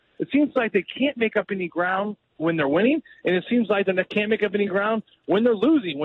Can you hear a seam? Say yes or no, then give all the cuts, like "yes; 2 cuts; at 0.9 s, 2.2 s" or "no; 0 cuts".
no; 0 cuts